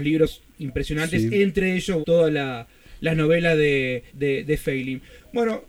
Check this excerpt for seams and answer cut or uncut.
cut